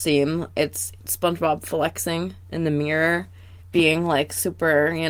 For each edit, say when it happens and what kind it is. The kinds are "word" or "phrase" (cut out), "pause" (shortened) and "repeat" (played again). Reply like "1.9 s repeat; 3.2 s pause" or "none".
1.0 s pause; 3.6 s pause